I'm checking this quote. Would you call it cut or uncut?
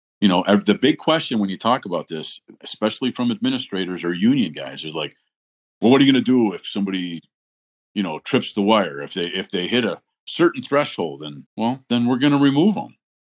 cut